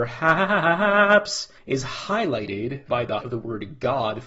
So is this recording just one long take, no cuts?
no; 3 cuts; at 1.6 s, 2.9 s, 3.2 s

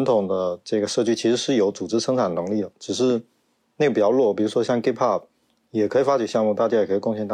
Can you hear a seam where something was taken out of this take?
no; 0 cuts

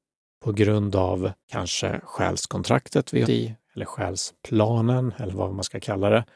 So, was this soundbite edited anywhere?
yes; 2 cuts; at 1.4 s, 3.2 s

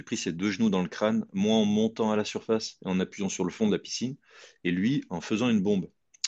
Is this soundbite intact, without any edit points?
yes; 0 cuts

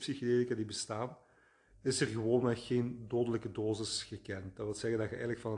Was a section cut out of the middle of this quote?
no; 0 cuts

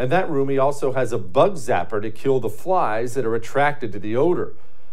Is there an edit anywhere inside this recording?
no; 0 cuts

